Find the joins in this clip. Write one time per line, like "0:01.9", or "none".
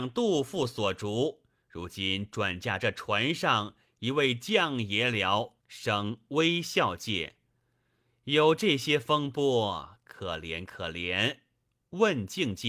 0:05.6